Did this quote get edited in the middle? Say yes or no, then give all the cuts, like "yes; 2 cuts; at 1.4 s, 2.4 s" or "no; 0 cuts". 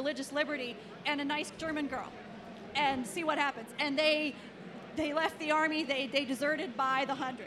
no; 0 cuts